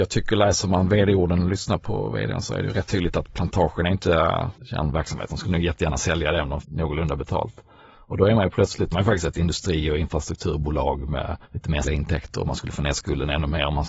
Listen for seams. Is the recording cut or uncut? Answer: cut